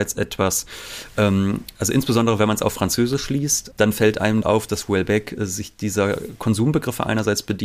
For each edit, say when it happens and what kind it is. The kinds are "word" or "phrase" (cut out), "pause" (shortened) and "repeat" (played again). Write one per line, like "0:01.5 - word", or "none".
0:01.7 - pause
0:03.7 - word
0:04.4 - word